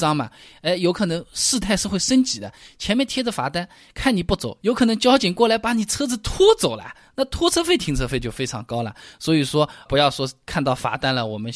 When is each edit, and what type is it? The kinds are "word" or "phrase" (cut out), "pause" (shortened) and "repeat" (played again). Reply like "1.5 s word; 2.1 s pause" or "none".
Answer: 9.9 s word